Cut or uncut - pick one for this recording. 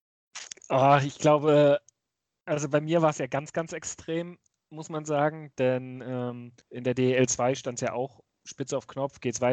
cut